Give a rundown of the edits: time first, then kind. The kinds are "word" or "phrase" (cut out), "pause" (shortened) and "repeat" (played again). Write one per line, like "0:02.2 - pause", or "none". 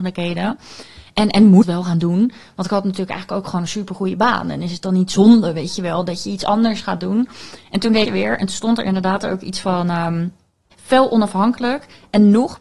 0:01.6 - phrase
0:08.0 - phrase
0:10.7 - word